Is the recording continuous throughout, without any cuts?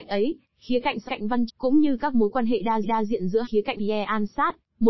no; 5 cuts; at 1.1 s, 1.5 s, 2.8 s, 3.4 s, 3.8 s

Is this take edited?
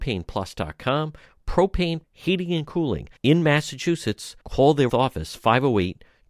yes; 4 cuts; at 2.0 s, 3.2 s, 4.4 s, 4.9 s

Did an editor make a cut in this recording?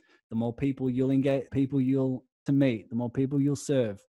yes; 2 cuts; at 1.5 s, 2.5 s

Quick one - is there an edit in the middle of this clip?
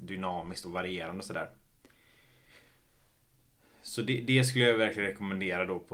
no; 0 cuts

